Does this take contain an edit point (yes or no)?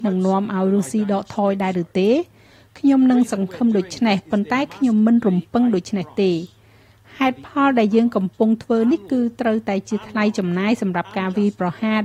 no